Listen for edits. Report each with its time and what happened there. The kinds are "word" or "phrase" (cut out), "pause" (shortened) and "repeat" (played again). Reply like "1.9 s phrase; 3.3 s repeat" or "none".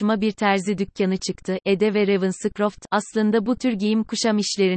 none

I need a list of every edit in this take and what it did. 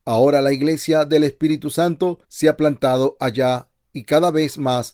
2.2 s pause

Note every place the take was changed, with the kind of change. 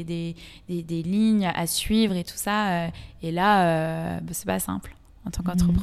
none

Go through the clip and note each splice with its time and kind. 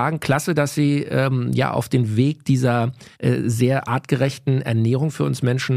3.1 s pause

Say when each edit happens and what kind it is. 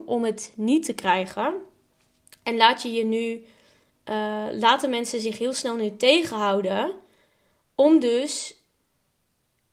none

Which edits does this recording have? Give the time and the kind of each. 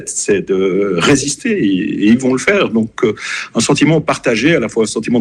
none

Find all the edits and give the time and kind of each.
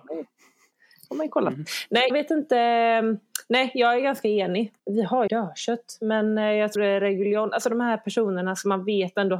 2.1 s word; 4.8 s pause; 5.3 s phrase; 6.8 s word

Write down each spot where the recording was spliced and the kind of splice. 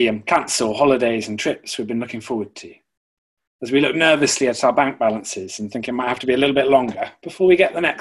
none

